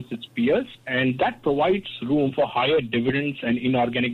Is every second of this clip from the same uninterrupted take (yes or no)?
yes